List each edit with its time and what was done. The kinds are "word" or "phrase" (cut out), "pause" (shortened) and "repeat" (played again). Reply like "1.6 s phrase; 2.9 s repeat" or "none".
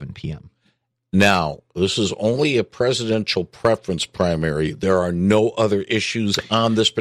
none